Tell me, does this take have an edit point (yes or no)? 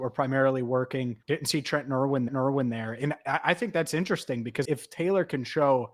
yes